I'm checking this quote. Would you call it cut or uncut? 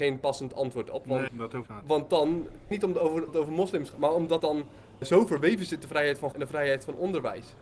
cut